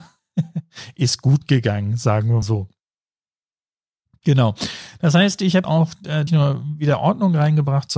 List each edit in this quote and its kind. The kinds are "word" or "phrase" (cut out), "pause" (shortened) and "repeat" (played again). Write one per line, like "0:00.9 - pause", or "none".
0:02.4 - word
0:05.6 - word
0:06.3 - phrase